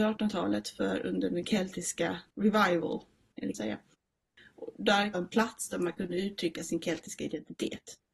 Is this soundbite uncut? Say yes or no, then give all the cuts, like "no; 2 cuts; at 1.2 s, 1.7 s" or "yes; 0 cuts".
no; 3 cuts; at 2.3 s, 3.5 s, 5.1 s